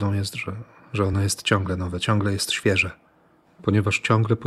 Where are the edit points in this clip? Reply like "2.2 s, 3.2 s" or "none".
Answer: none